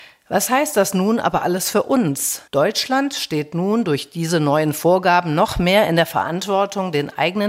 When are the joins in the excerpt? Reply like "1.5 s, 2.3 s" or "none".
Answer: 2.5 s